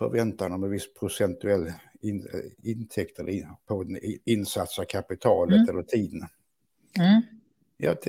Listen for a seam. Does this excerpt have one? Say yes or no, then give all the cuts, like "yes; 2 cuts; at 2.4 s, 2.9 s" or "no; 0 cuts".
no; 0 cuts